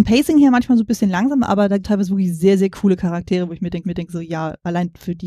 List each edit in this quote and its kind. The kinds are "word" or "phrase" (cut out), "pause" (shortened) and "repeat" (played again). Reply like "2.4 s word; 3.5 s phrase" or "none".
1.8 s word; 3.8 s repeat